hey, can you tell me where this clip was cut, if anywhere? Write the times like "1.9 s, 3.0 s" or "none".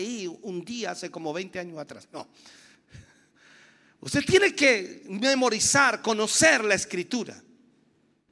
none